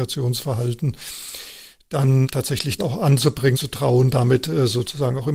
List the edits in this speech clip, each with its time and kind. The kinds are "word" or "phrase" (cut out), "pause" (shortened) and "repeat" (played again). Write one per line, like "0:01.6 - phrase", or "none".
0:02.8 - word
0:03.5 - phrase